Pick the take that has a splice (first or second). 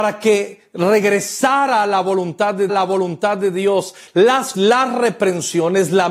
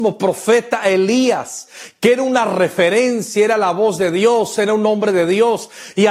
first